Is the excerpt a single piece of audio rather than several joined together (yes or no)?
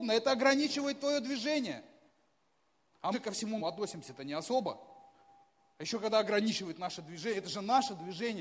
no